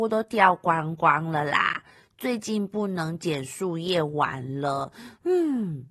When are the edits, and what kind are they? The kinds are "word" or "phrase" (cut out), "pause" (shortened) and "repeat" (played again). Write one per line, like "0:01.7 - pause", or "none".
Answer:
none